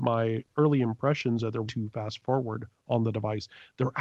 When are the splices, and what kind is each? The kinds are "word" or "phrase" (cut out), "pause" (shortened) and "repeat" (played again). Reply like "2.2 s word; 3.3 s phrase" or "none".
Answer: 1.6 s phrase

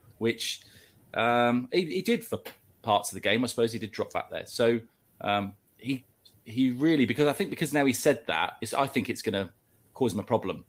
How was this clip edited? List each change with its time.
none

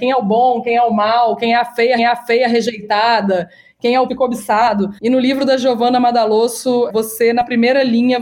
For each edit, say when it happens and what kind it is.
2.0 s repeat; 4.1 s word; 5.0 s pause; 6.9 s word

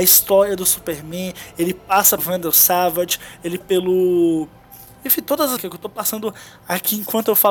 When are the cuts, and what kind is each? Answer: 2.2 s word; 3.6 s word; 5.6 s word

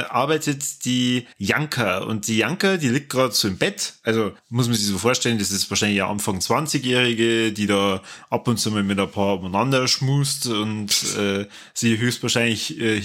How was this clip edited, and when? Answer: 1.3 s pause; 4.4 s pause

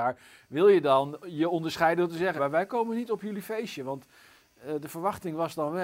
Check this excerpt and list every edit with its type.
2.4 s word

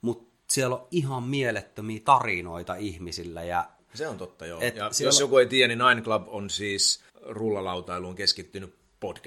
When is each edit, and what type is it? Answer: 7.1 s pause

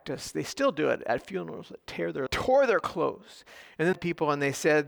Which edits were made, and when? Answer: 2.3 s phrase; 3.6 s pause; 3.9 s phrase

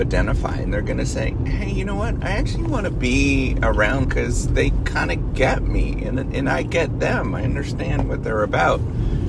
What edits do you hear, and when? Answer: 4.0 s phrase

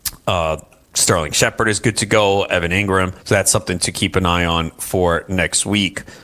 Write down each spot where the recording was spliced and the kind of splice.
3.2 s pause

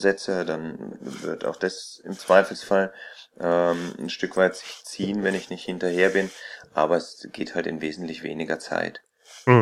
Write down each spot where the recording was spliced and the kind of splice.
none

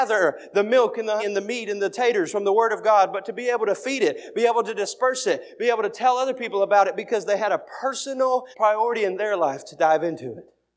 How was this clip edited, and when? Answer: 1.2 s word; 8.5 s pause

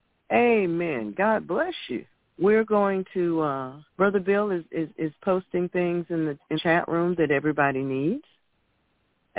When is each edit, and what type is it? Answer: 2.1 s pause; 3.9 s pause; 6.5 s word

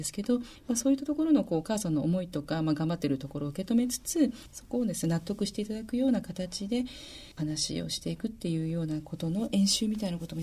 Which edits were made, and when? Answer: 7.3 s pause

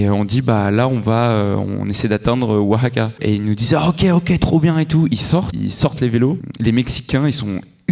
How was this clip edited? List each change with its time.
none

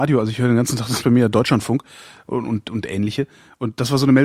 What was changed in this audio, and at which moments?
1.0 s word

